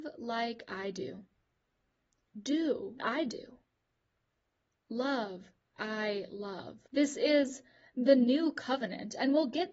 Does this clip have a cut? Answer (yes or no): yes